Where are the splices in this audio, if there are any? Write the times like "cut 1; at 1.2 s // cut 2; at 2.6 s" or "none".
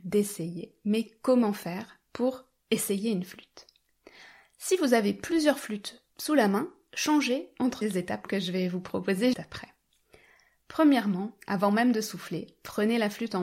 cut 1; at 7.8 s // cut 2; at 9.3 s